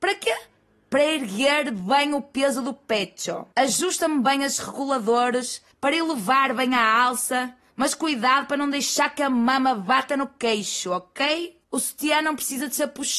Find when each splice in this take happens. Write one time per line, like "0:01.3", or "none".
0:03.5
0:05.7
0:11.6

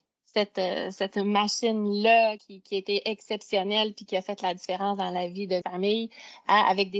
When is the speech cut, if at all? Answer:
0:02.4
0:05.6

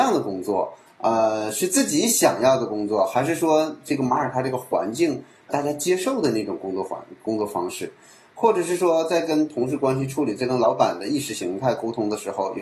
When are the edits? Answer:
0:05.5

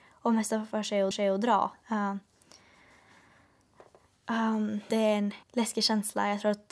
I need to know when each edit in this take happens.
0:01.1
0:04.9
0:05.4

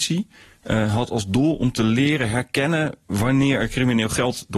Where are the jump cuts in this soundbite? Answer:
none

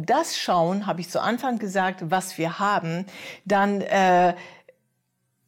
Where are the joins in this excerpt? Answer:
none

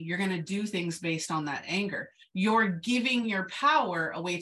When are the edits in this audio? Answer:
none

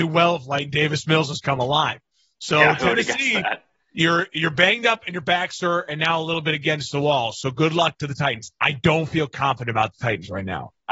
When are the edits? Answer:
none

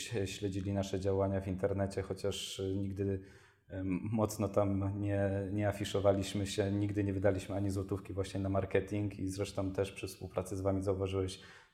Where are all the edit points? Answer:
none

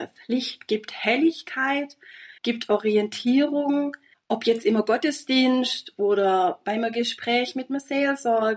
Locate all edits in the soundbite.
0:02.4
0:04.1

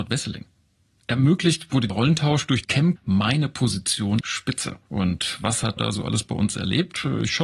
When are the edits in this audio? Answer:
0:01.9
0:02.6
0:03.0
0:04.2
0:05.8

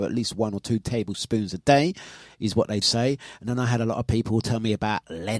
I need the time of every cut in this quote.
0:02.8

